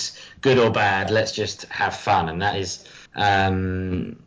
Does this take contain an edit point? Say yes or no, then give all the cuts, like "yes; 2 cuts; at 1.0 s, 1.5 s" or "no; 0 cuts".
yes; 1 cut; at 3.1 s